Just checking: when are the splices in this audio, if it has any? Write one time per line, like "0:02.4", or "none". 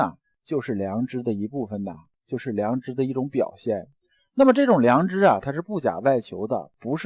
none